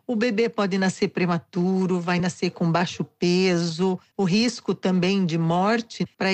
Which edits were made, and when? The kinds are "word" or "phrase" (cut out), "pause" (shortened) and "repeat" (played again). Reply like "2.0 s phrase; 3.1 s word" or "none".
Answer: none